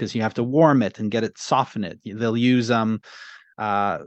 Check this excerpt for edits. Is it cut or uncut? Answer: uncut